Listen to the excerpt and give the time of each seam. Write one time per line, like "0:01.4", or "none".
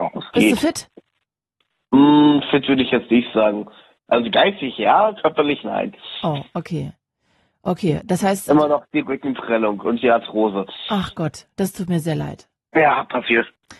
none